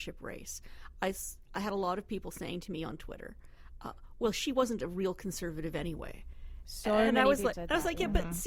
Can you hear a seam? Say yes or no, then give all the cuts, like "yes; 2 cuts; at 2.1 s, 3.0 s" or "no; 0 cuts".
yes; 1 cut; at 7.5 s